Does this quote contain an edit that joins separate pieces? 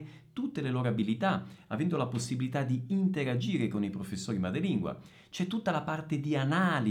no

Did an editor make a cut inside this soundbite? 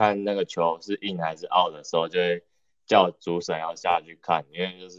no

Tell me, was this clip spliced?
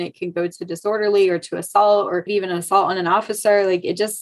yes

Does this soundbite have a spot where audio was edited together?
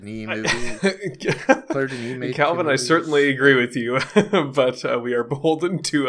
no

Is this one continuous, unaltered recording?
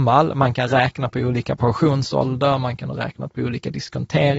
yes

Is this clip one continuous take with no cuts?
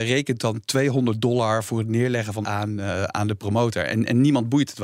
no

